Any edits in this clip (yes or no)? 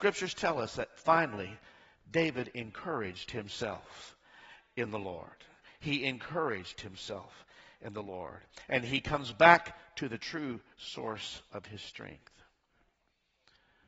no